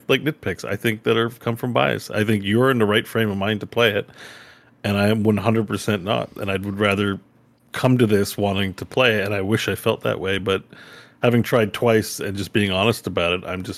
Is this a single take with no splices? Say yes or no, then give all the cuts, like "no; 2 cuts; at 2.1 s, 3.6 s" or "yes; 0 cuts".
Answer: yes; 0 cuts